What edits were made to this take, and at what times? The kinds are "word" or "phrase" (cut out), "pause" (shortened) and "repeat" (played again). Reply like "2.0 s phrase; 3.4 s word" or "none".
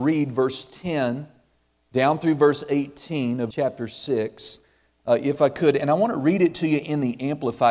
3.5 s word